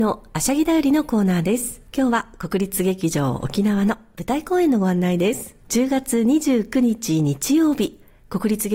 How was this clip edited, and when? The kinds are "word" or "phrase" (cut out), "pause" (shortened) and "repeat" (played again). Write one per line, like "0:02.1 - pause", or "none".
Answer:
0:01.9 - pause
0:05.6 - pause